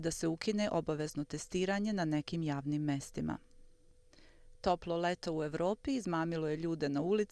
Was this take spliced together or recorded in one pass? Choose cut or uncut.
uncut